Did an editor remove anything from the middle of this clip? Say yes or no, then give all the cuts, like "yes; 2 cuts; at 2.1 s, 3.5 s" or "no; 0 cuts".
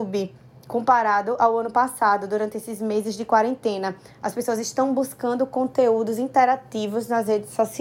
no; 0 cuts